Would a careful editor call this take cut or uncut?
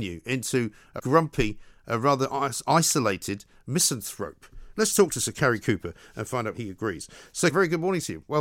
cut